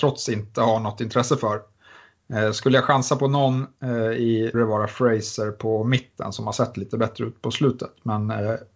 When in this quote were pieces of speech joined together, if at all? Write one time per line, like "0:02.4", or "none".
0:04.5